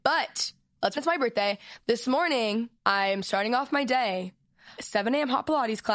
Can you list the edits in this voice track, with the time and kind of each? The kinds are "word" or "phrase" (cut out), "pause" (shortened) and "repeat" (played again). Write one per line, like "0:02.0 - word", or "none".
0:01.0 - word
0:02.8 - pause
0:04.8 - word